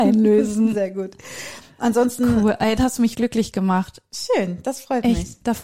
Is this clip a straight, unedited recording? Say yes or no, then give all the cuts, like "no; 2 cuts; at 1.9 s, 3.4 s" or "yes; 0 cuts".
no; 2 cuts; at 2.8 s, 3.1 s